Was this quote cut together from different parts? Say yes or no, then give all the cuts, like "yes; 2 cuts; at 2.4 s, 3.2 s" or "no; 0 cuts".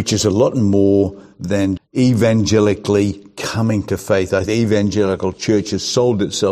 yes; 2 cuts; at 1.8 s, 4.5 s